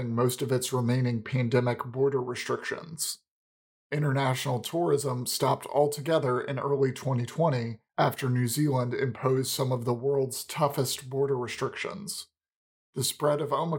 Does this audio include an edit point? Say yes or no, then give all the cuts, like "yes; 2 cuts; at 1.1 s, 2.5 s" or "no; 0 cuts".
yes; 1 cut; at 7.9 s